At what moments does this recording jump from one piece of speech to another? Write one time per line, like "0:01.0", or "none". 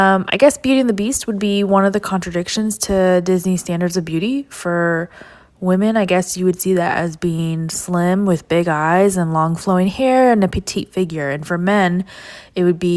none